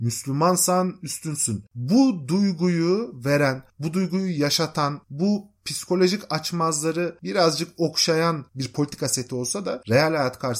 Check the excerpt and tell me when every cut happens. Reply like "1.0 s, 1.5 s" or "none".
1.7 s